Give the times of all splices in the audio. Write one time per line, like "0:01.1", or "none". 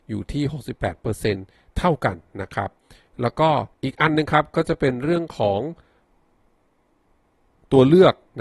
0:03.7